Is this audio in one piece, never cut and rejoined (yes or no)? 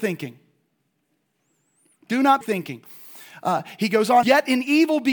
no